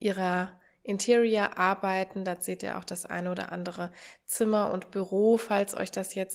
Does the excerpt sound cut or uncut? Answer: uncut